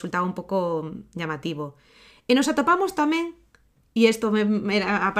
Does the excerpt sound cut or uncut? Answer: uncut